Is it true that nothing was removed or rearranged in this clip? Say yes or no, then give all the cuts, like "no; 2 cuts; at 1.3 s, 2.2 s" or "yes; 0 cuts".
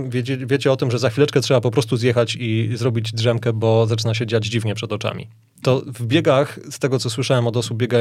yes; 0 cuts